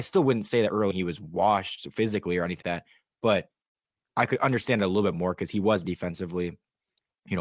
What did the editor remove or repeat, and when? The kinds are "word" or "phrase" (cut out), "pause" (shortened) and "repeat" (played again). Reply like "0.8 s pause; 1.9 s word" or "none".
0.9 s word; 2.6 s word; 5.8 s word